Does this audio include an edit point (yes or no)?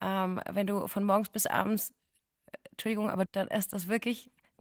yes